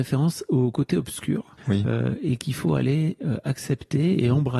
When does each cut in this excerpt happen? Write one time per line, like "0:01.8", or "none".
0:01.6